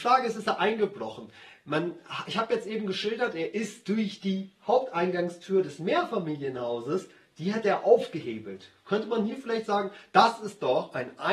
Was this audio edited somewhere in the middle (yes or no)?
no